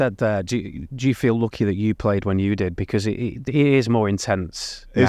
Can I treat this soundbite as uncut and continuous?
yes; 0 cuts

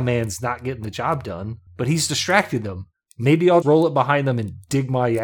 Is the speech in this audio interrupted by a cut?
yes; 1 cut; at 3.6 s

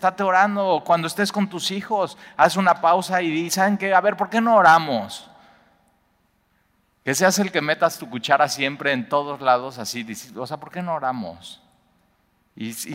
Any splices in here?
no; 0 cuts

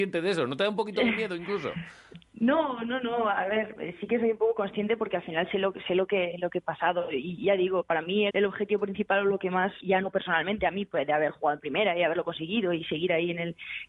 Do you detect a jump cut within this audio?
yes; 2 cuts; at 8.3 s, 9.8 s

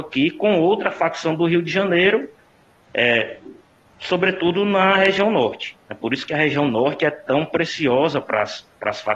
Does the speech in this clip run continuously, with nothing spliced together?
yes; 0 cuts

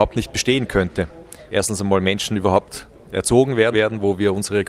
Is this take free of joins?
no; 3 cuts; at 1.5 s, 2.9 s, 3.7 s

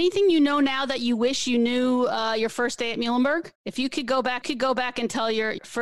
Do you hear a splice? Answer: yes; 2 cuts; at 3.6 s, 4.4 s

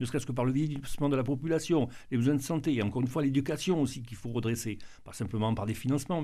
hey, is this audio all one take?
yes; 0 cuts

